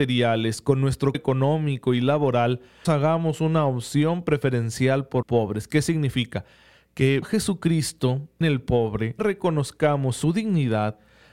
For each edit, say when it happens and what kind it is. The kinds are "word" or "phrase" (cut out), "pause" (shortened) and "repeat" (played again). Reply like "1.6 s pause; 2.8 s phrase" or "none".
1.1 s word; 2.8 s word; 5.2 s word; 7.2 s word; 8.4 s word; 9.2 s word